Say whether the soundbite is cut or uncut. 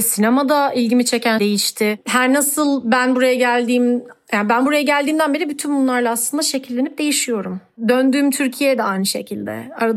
cut